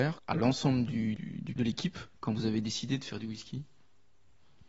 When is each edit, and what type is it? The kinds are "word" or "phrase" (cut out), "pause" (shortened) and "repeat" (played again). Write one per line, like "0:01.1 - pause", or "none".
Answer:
0:01.6 - word
0:02.1 - pause